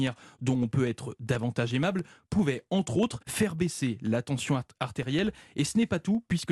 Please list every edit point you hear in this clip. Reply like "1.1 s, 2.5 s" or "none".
3.2 s

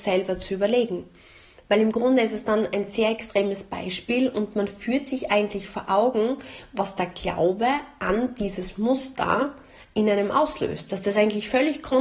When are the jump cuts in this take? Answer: none

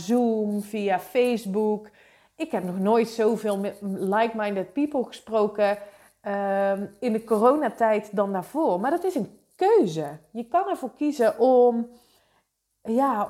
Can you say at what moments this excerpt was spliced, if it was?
none

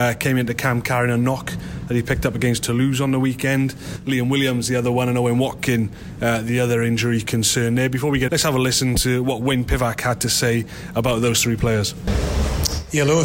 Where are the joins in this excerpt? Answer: 8.3 s

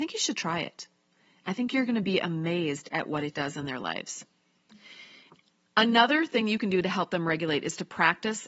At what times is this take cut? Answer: none

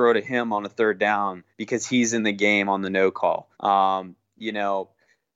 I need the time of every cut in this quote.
1.5 s, 3.5 s

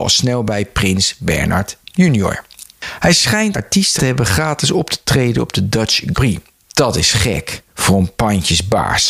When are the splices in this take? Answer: 3.5 s, 4.0 s, 6.1 s

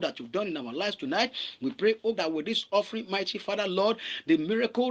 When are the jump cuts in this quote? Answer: 2.2 s

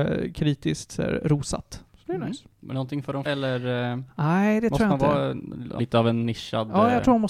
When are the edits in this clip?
1.9 s, 2.5 s, 3.3 s, 5.8 s

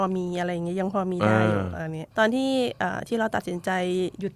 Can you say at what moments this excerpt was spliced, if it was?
2.1 s

